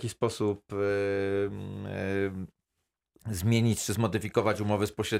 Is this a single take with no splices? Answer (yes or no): yes